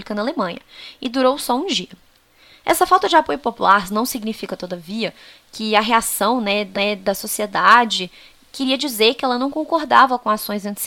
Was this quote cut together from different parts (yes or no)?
yes